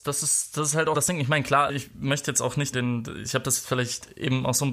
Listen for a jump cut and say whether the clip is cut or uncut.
cut